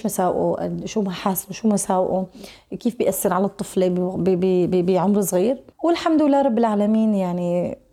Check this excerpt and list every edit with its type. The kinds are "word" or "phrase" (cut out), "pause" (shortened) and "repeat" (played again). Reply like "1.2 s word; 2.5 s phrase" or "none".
5.7 s pause